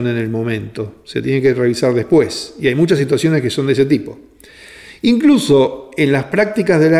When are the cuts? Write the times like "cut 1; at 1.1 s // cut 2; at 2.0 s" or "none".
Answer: none